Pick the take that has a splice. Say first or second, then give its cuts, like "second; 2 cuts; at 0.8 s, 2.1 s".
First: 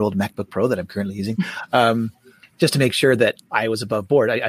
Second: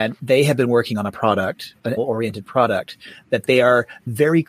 second; 1 cut; at 2.0 s